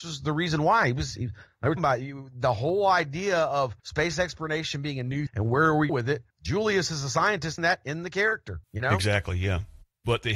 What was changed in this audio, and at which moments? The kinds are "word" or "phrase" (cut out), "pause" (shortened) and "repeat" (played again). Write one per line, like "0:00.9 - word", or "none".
0:01.8 - word
0:03.8 - pause
0:05.3 - word
0:05.9 - phrase
0:06.3 - pause
0:07.6 - phrase
0:08.6 - pause